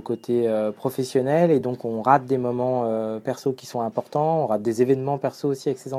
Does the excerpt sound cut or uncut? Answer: uncut